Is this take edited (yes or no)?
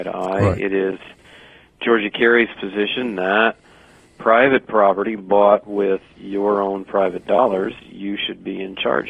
no